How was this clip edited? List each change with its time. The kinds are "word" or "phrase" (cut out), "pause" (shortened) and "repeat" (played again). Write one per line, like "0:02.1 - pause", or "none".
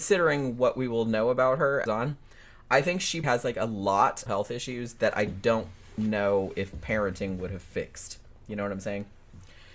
0:01.9 - phrase
0:03.2 - word
0:04.3 - phrase